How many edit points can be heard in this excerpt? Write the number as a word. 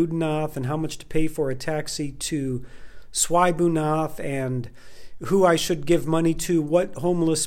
zero